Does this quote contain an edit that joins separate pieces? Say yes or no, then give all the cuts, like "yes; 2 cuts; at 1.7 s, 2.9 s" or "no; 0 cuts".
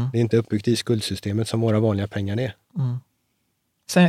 no; 0 cuts